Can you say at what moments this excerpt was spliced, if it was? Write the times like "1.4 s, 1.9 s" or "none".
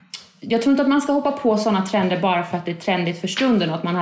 none